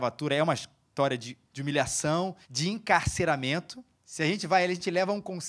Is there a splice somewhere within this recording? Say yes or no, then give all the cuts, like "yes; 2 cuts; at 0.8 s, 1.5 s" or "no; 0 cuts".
yes; 3 cuts; at 1.5 s, 2.4 s, 3.9 s